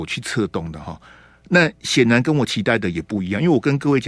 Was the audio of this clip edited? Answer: no; 0 cuts

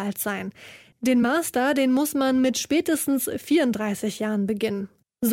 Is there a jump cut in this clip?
no; 0 cuts

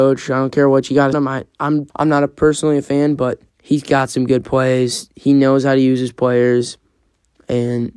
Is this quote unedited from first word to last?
no; 3 cuts; at 1.1 s, 1.9 s, 3.5 s

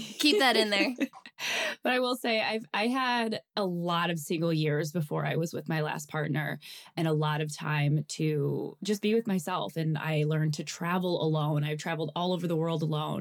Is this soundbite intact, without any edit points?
yes; 0 cuts

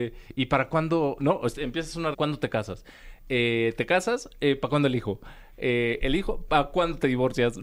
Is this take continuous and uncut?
no; 1 cut; at 2.1 s

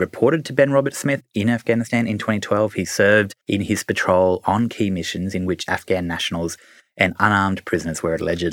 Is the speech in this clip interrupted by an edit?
yes; 1 cut; at 3.4 s

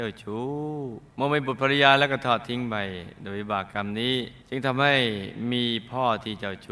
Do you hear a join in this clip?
yes; 2 cuts; at 1.1 s, 4.4 s

